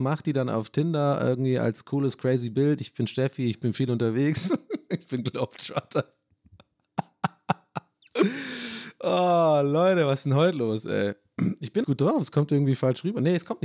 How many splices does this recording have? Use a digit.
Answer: 1